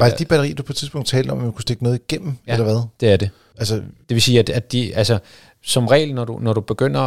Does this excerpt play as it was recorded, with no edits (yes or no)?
yes